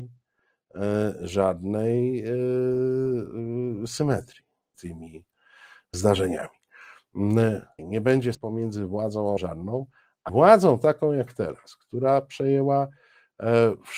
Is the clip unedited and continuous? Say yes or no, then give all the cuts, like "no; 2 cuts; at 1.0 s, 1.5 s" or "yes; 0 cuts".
no; 6 cuts; at 4.7 s, 5.9 s, 7.8 s, 8.3 s, 9.4 s, 10.3 s